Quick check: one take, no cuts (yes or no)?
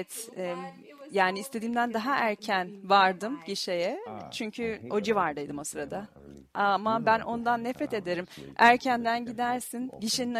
yes